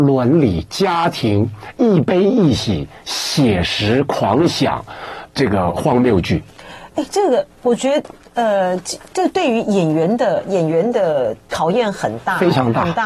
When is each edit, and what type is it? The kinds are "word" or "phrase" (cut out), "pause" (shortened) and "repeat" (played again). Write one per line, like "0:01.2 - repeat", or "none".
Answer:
0:05.3 - word